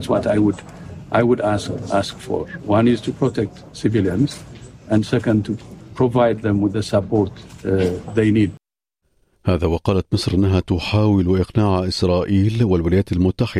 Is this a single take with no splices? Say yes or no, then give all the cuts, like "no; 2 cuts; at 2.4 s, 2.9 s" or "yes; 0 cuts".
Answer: yes; 0 cuts